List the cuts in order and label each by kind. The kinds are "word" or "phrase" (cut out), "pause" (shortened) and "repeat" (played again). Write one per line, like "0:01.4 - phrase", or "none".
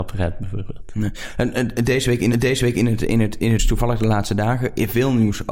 0:02.3 - repeat
0:03.6 - word